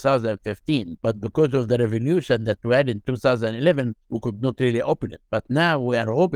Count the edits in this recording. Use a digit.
3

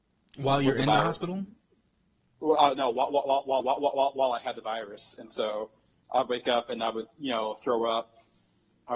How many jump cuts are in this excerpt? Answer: 1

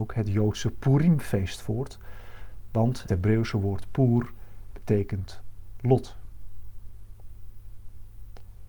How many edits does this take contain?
1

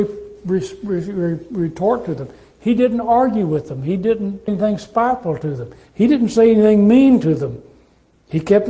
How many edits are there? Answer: 1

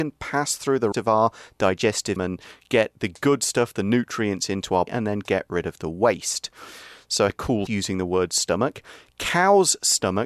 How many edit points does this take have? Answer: 5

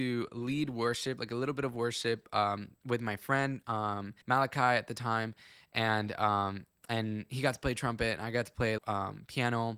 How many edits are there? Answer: 2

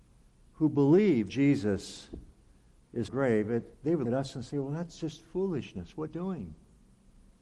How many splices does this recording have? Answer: 5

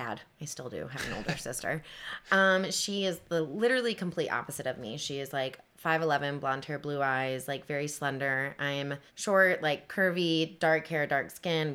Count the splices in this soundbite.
1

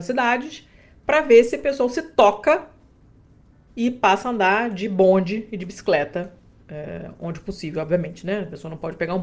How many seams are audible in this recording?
0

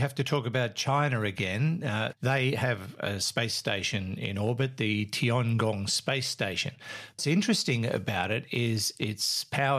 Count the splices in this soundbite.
1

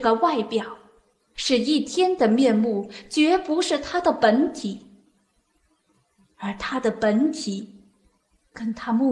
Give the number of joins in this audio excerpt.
0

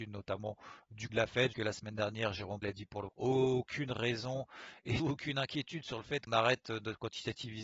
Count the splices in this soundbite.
6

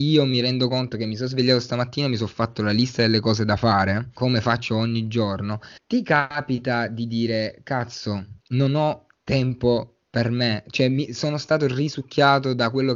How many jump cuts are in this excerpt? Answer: 2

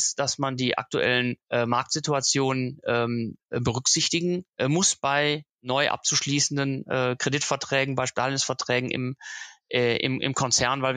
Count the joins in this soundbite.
3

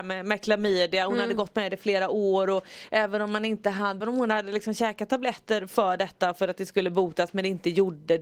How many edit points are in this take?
1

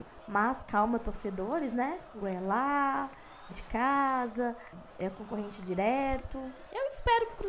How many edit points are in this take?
2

